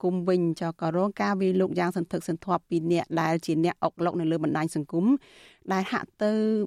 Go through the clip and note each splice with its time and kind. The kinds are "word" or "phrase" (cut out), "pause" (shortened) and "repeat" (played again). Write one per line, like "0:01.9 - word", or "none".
none